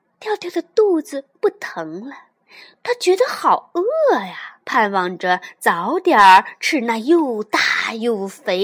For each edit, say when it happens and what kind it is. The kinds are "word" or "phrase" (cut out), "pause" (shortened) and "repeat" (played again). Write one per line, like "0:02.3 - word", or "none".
0:04.6 - pause